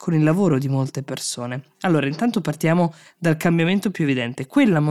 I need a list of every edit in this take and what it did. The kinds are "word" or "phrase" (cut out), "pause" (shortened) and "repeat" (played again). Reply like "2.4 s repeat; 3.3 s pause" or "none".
none